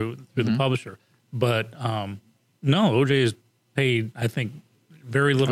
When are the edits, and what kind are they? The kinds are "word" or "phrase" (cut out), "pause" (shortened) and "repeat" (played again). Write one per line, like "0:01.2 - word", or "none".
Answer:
none